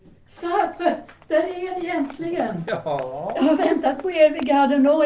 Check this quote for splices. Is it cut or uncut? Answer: uncut